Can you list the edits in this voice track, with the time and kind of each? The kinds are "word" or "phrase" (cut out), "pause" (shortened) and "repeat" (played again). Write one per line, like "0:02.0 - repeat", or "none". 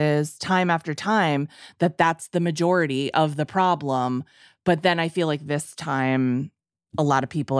none